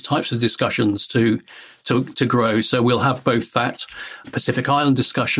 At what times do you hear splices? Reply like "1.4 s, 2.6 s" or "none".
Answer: 4.2 s

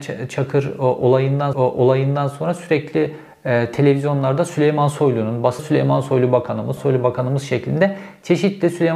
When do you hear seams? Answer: 1.5 s, 5.6 s, 6.8 s

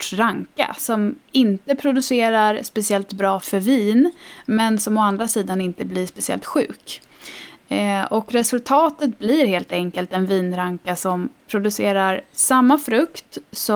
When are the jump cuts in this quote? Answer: 3.4 s

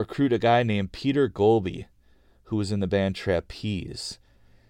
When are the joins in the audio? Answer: none

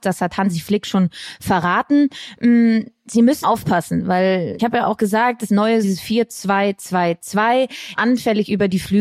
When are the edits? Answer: 3.4 s, 4.6 s, 5.5 s, 5.8 s, 7.9 s

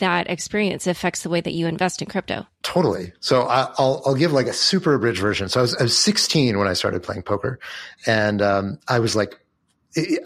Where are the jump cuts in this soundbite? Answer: 2.5 s

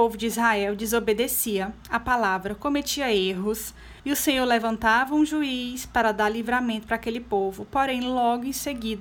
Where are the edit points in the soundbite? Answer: 4.0 s

